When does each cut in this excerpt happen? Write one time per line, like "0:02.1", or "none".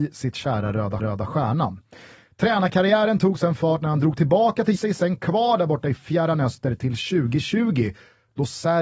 0:01.0
0:04.8